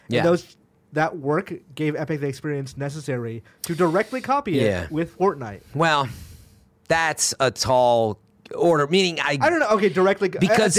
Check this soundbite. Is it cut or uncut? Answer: uncut